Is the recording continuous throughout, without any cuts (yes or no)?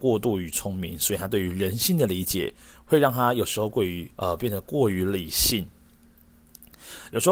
no